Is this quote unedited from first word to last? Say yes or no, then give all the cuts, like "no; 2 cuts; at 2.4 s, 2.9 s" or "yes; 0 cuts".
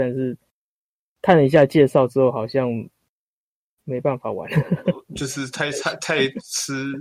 yes; 0 cuts